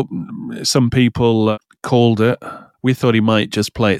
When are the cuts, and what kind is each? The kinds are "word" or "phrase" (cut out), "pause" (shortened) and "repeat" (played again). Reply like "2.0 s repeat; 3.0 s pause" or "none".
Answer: none